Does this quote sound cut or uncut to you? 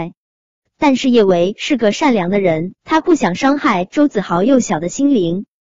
cut